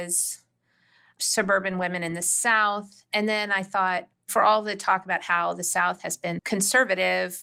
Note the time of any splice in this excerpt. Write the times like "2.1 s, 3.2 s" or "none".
4.1 s, 6.4 s

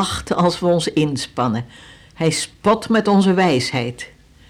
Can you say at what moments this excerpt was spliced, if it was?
none

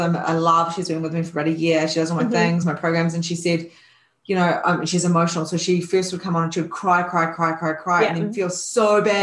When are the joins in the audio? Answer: none

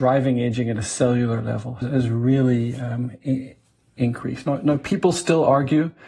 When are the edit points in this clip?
1.8 s

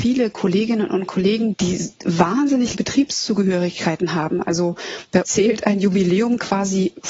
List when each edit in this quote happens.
1.5 s, 2.7 s, 5.2 s

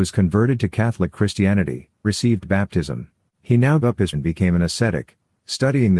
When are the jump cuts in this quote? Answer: 2.0 s, 3.3 s, 3.8 s, 4.1 s

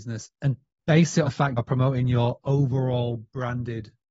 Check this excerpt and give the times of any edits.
1.3 s, 1.6 s

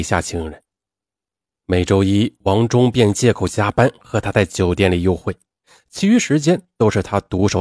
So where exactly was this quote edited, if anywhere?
none

